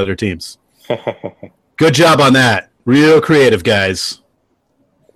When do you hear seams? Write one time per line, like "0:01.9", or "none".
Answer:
none